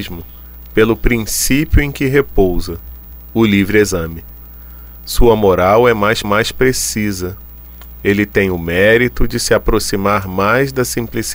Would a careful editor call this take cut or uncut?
cut